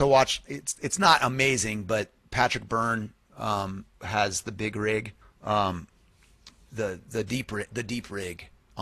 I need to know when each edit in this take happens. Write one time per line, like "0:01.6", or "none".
0:03.9
0:05.2